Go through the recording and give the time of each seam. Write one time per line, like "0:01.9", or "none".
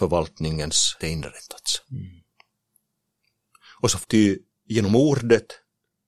0:01.0
0:04.0